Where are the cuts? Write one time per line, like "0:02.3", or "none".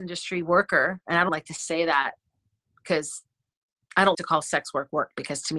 0:01.3
0:04.1